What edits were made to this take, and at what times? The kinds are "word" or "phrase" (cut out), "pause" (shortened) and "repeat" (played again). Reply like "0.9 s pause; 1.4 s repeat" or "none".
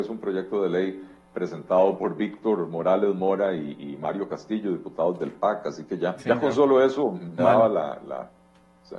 2.0 s word; 6.2 s word; 7.4 s word

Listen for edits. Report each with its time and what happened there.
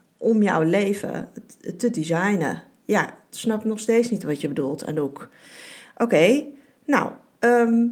none

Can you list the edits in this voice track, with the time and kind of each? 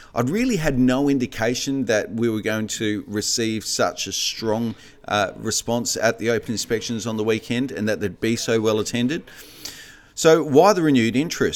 none

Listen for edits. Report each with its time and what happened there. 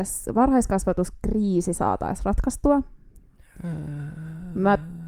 none

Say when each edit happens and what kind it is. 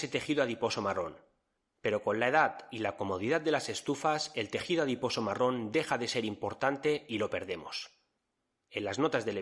none

